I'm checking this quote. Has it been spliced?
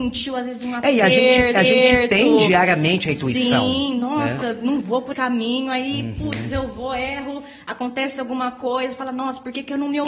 yes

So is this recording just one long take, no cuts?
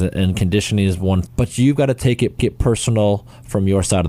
no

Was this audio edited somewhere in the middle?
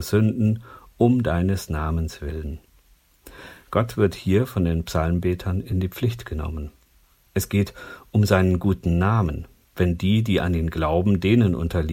no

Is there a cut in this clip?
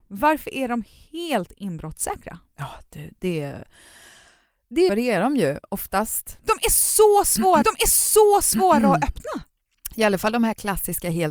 yes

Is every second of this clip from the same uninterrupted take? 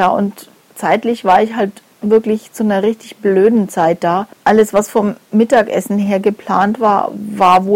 no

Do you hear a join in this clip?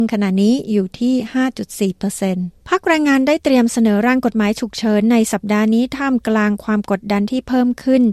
yes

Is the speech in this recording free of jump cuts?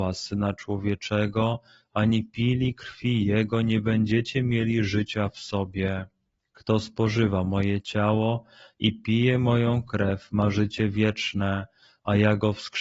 yes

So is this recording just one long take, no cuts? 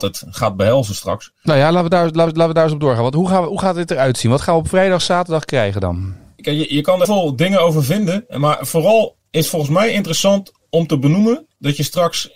no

